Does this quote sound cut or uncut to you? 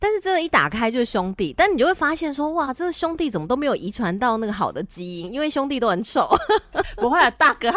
uncut